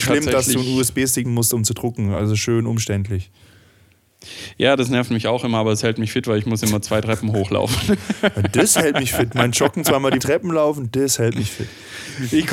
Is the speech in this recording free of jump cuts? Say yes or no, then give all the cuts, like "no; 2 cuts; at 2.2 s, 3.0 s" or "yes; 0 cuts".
no; 2 cuts; at 1.2 s, 10.2 s